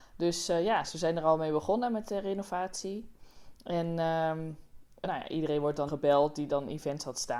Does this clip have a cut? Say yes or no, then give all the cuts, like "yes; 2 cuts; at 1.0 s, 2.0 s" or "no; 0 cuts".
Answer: yes; 3 cuts; at 5.0 s, 5.9 s, 6.5 s